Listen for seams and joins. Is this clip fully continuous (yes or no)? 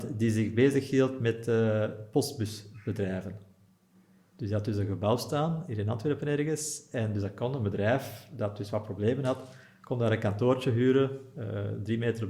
yes